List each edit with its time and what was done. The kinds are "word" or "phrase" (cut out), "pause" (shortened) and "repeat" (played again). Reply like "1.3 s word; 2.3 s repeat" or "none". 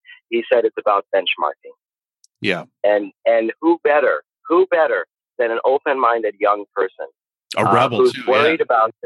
none